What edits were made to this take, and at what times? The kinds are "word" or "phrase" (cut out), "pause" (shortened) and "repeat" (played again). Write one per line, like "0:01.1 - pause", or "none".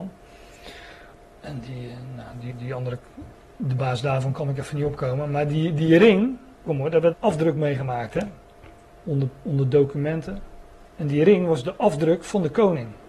0:01.1 - pause
0:02.5 - repeat
0:06.7 - phrase
0:07.1 - word
0:08.9 - pause
0:10.9 - pause